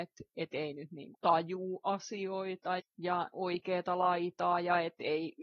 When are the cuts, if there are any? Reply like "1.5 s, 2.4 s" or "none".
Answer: 1.1 s, 2.8 s, 3.3 s